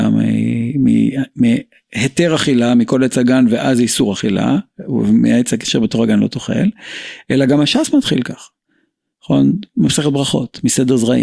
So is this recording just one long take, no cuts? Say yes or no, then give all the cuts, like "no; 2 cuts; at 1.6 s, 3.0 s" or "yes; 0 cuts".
yes; 0 cuts